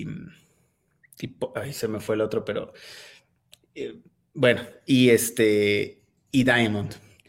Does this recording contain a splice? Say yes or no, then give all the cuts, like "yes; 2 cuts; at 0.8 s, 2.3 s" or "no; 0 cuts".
no; 0 cuts